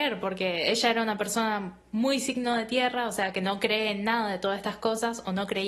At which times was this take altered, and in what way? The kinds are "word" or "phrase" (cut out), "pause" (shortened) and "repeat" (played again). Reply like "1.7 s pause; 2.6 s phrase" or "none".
none